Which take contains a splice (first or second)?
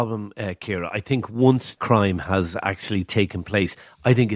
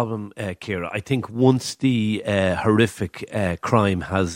first